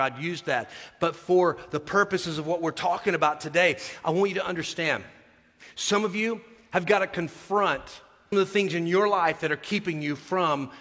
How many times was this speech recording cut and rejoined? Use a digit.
1